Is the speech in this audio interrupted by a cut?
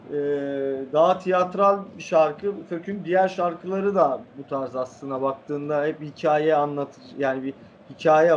yes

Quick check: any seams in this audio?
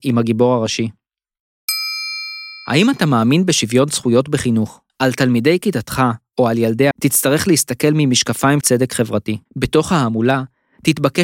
yes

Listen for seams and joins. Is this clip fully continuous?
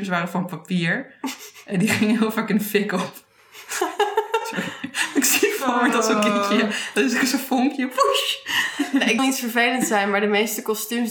no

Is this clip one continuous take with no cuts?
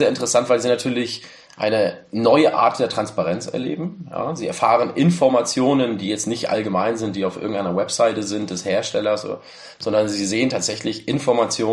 yes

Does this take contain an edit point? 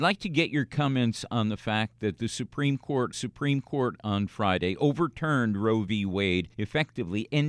yes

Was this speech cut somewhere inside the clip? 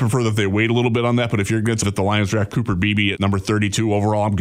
yes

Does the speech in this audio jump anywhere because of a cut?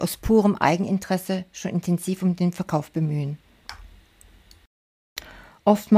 no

